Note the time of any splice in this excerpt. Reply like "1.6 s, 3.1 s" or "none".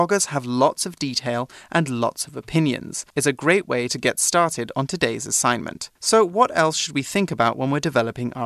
3.1 s, 6.0 s